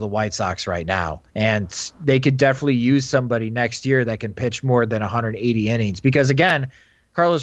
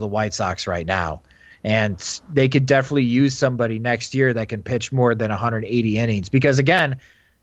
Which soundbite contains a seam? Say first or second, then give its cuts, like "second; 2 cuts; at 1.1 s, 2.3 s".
first; 1 cut; at 1.3 s